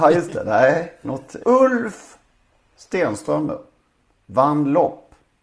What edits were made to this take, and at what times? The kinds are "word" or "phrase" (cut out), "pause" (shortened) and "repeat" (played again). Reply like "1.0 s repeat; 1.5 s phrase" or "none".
1.4 s word